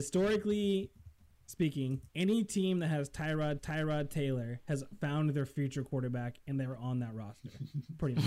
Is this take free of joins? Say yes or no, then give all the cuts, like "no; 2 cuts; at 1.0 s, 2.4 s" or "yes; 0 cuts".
no; 2 cuts; at 2.1 s, 3.6 s